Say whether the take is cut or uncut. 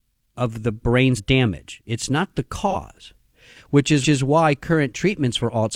cut